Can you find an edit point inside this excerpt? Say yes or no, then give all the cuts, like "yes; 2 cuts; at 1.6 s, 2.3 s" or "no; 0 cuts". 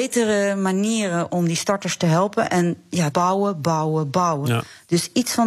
yes; 2 cuts; at 1.3 s, 3.1 s